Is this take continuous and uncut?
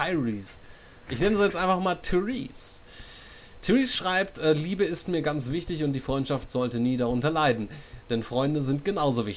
yes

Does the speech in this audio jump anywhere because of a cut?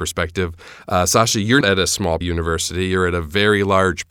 yes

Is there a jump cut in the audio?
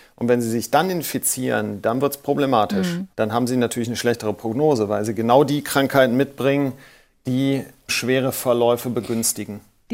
yes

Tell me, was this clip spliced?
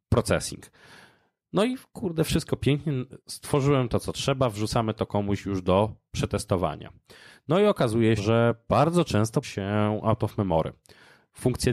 yes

